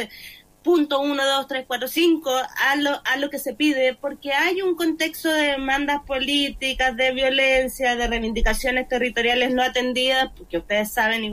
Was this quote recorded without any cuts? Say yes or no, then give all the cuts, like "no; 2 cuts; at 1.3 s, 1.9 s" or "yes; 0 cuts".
yes; 0 cuts